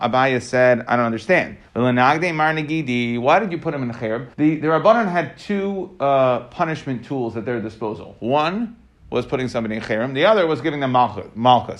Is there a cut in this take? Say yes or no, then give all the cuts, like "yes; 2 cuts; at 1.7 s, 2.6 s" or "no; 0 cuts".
yes; 2 cuts; at 1.7 s, 4.3 s